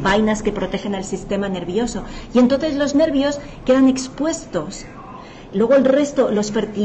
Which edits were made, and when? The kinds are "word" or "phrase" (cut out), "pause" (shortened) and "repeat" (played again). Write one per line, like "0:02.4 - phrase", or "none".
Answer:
none